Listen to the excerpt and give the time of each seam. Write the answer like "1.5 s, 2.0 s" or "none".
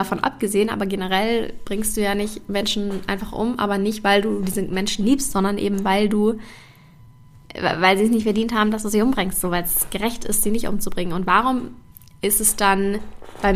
none